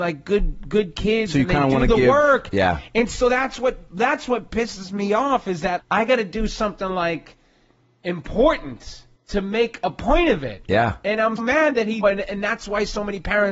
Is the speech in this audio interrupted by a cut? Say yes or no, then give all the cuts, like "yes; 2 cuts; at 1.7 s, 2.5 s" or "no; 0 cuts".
yes; 4 cuts; at 5.8 s, 9.2 s, 11.4 s, 12.0 s